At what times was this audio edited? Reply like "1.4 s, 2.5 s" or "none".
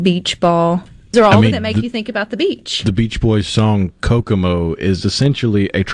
1.1 s, 1.5 s